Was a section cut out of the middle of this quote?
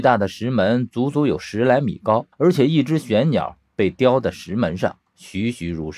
yes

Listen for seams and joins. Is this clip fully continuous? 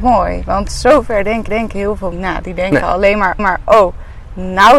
no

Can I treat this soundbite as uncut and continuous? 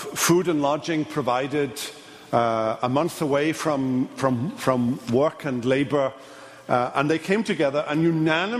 yes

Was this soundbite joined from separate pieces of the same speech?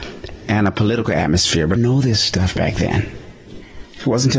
yes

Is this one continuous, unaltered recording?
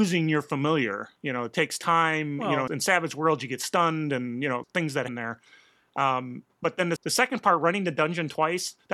no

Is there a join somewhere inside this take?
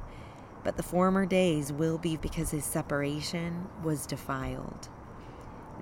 yes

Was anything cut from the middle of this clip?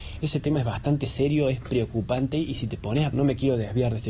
yes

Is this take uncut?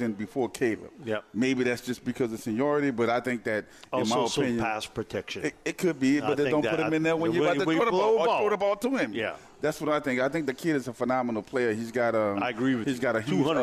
yes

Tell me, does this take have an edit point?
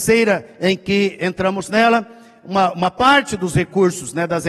no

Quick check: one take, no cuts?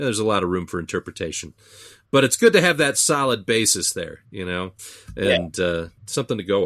yes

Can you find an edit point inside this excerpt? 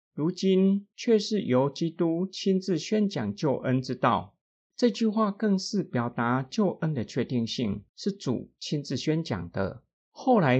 yes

